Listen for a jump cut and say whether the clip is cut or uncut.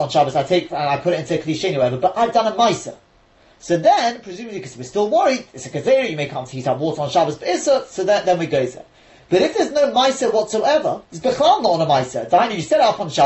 cut